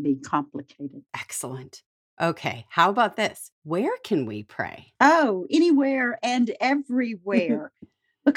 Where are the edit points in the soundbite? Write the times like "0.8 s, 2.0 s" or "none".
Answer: 1.1 s, 3.5 s